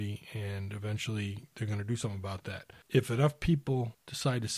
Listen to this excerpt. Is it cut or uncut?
uncut